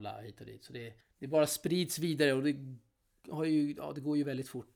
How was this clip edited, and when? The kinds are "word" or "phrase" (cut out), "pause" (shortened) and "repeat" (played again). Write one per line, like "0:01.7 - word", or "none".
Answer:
0:01.0 - pause